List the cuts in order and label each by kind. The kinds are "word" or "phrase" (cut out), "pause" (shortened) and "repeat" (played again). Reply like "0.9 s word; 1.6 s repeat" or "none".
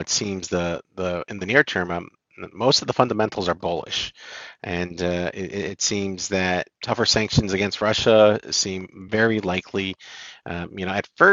none